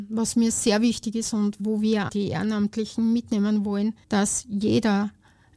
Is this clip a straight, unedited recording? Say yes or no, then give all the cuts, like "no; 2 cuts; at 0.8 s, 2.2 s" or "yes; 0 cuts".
no; 3 cuts; at 1.6 s, 2.1 s, 4.0 s